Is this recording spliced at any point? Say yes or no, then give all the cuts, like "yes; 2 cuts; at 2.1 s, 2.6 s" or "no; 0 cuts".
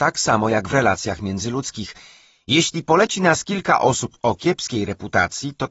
no; 0 cuts